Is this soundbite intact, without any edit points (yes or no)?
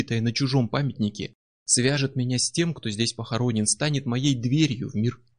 yes